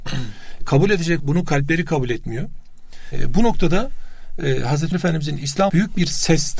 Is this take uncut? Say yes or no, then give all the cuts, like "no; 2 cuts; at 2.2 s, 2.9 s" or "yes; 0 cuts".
no; 3 cuts; at 1.2 s, 4.9 s, 5.7 s